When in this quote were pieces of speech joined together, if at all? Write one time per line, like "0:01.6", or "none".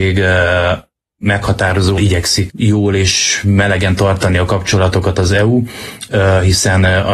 0:02.0
0:02.5